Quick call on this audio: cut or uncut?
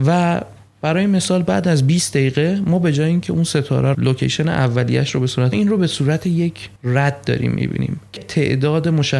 cut